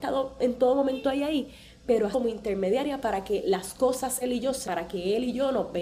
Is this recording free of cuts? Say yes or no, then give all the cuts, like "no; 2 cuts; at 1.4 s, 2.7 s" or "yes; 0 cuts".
no; 3 cuts; at 2.1 s, 4.2 s, 4.6 s